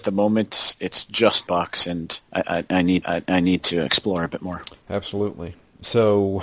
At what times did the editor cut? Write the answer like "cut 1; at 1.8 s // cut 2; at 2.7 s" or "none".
cut 1; at 1.5 s // cut 2; at 2.2 s // cut 3; at 3.0 s